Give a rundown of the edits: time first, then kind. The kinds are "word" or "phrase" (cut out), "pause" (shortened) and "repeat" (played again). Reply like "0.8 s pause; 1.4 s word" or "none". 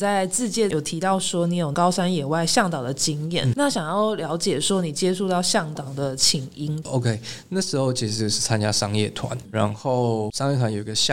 3.5 s word